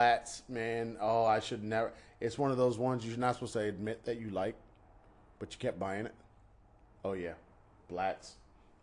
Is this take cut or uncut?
uncut